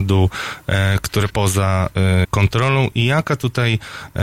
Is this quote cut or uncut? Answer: cut